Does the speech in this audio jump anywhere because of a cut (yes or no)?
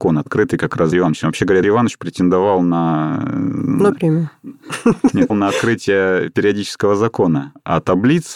yes